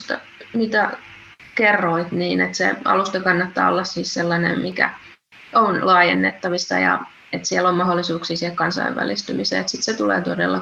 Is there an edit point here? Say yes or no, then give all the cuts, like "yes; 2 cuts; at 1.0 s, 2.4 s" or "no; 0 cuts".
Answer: yes; 1 cut; at 7.1 s